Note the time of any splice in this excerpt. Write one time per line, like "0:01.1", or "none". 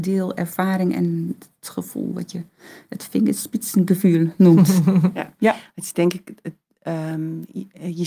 none